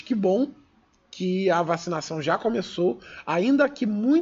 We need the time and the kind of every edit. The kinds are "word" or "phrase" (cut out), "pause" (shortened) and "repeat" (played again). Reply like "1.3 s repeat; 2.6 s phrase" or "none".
none